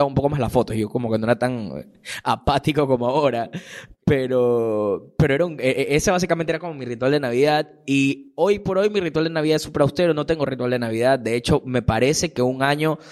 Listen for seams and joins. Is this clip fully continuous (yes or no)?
yes